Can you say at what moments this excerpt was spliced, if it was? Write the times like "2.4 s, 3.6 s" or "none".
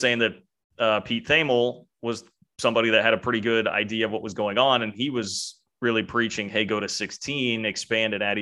none